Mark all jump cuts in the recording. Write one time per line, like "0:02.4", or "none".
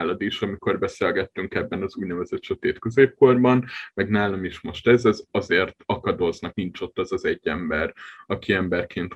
0:06.5